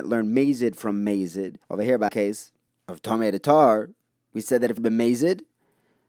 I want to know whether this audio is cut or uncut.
cut